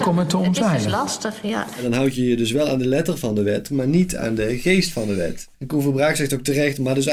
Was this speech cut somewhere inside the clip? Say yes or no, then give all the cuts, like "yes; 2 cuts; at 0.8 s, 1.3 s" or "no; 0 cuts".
yes; 1 cut; at 5.5 s